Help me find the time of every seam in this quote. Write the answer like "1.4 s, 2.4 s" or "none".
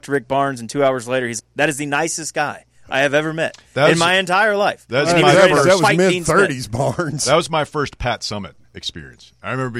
1.4 s